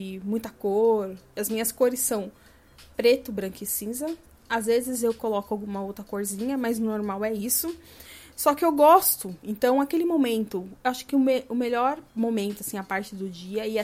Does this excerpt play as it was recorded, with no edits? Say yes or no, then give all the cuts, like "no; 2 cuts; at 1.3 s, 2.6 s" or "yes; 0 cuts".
no; 2 cuts; at 4.3 s, 12.1 s